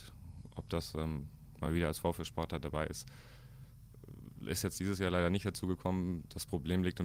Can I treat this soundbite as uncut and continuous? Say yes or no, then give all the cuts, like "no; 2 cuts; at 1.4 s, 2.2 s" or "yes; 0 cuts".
yes; 0 cuts